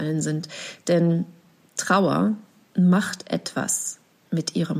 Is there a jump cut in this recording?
no; 0 cuts

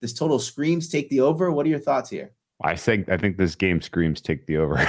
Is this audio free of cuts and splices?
yes; 0 cuts

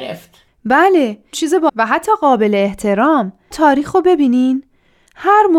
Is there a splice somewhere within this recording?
yes; 3 cuts; at 1.3 s, 1.7 s, 3.5 s

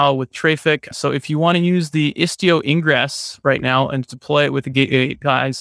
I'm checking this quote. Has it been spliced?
no; 0 cuts

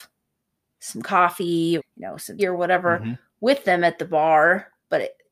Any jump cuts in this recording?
yes; 2 cuts; at 1.8 s, 2.4 s

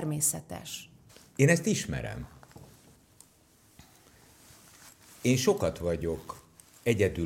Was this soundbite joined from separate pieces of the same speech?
no; 0 cuts

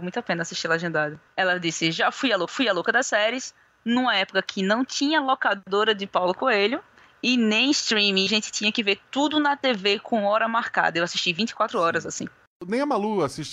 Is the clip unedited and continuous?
no; 2 cuts; at 2.5 s, 8.3 s

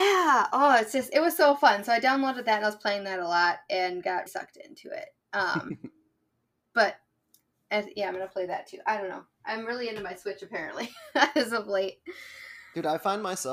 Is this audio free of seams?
no; 1 cut; at 4.3 s

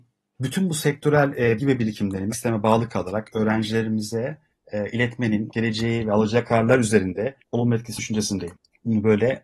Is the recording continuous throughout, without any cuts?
no; 6 cuts; at 1.6 s, 2.3 s, 4.5 s, 5.5 s, 7.4 s, 8.0 s

